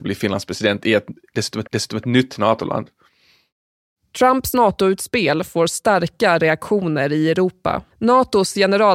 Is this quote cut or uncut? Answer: cut